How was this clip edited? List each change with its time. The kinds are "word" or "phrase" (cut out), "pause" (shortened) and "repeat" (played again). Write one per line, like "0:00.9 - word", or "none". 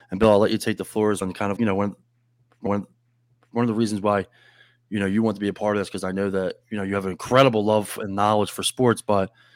0:01.2 - word
0:01.6 - word
0:02.7 - repeat